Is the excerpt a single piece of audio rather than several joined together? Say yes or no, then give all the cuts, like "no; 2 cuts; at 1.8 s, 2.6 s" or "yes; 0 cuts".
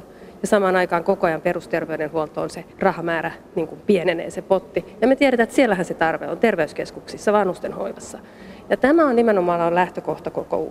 no; 1 cut; at 2.7 s